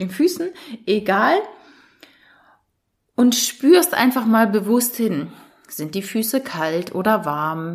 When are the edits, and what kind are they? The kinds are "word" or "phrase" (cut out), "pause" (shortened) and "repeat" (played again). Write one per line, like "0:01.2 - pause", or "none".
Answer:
none